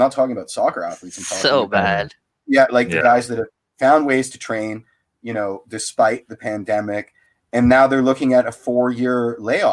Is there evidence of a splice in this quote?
no; 0 cuts

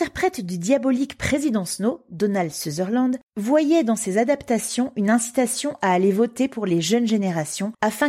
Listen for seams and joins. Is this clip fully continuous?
yes; 0 cuts

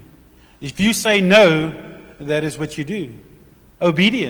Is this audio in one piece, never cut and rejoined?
yes; 0 cuts

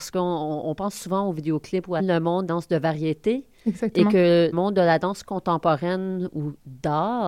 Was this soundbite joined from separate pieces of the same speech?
yes; 3 cuts; at 2.0 s, 2.5 s, 4.5 s

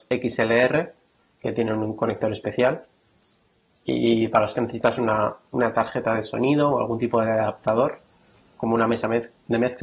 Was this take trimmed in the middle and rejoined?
no; 0 cuts

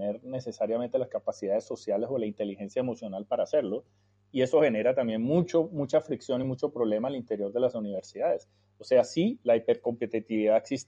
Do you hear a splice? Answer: no; 0 cuts

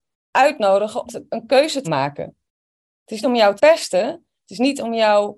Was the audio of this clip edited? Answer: yes; 4 cuts; at 1.1 s, 1.8 s, 3.2 s, 3.6 s

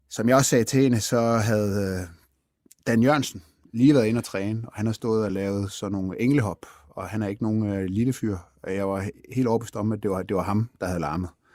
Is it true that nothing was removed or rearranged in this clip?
yes; 0 cuts

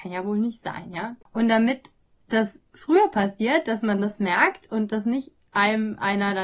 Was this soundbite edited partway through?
yes; 2 cuts; at 1.2 s, 2.7 s

